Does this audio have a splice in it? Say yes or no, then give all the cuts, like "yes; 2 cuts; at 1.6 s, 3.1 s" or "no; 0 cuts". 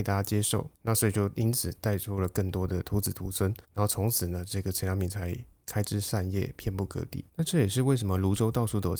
yes; 2 cuts; at 3.6 s, 7.3 s